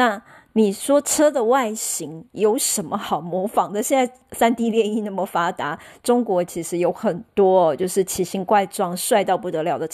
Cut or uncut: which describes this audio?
uncut